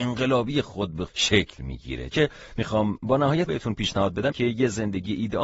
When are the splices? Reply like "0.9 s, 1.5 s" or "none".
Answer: 1.1 s, 2.1 s, 3.5 s, 4.3 s